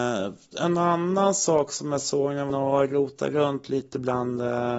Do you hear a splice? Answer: yes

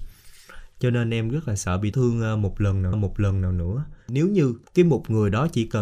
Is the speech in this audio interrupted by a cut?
yes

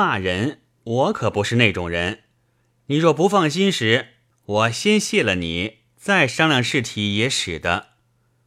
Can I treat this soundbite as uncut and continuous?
yes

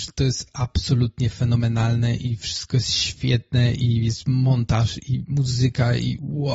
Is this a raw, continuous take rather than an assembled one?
yes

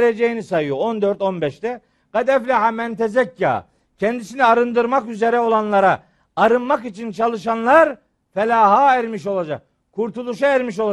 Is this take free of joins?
yes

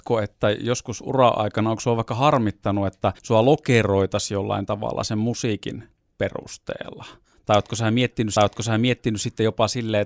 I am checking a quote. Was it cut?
yes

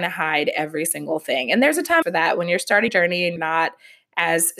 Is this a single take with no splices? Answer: no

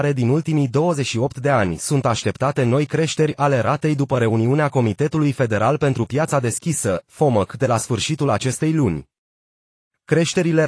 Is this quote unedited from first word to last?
yes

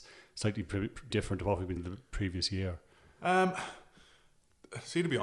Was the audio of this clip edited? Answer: yes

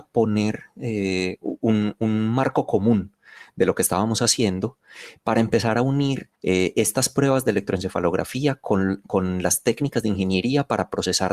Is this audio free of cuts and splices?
no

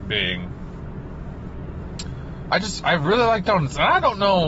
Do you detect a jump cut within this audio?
no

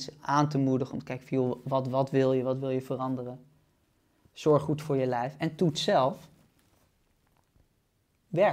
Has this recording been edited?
no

